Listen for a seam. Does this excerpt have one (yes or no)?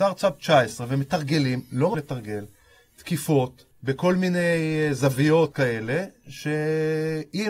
yes